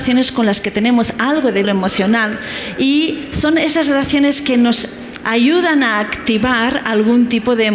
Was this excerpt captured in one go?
no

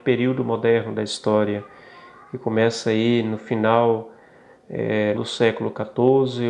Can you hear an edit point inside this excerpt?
yes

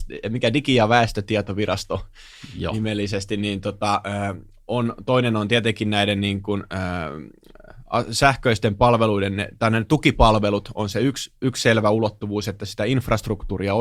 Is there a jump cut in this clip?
no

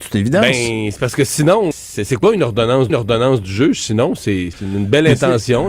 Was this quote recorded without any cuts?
no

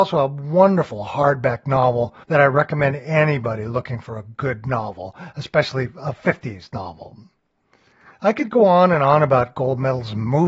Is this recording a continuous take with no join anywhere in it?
no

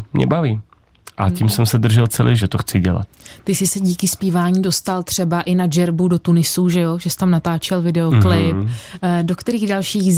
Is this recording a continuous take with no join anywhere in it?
no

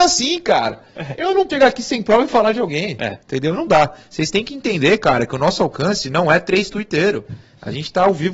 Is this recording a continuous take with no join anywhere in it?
no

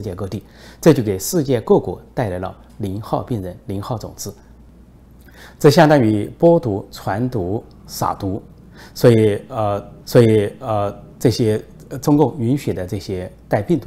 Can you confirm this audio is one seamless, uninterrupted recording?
no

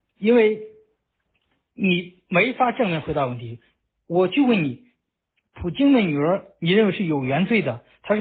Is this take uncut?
yes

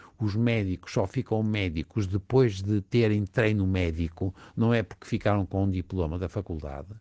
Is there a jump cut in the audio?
no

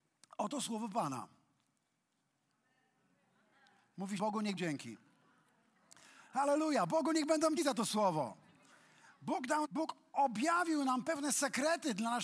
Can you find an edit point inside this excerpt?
yes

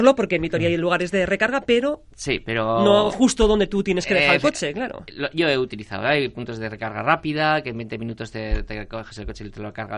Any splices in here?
no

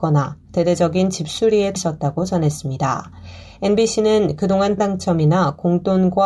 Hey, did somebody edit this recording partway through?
yes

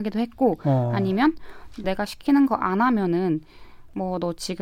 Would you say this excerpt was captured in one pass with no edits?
no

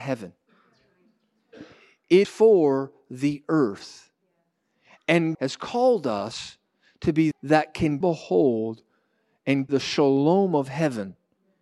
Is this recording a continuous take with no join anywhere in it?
no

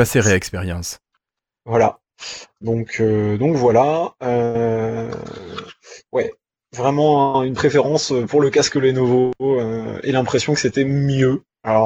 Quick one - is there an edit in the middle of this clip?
no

